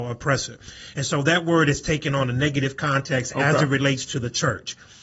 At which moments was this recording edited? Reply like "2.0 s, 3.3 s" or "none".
none